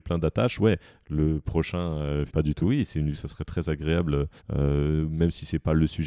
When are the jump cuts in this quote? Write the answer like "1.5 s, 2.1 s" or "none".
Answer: 2.3 s, 2.6 s, 3.1 s, 4.4 s